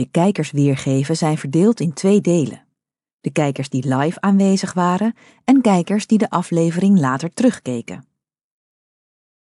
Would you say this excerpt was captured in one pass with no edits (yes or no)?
yes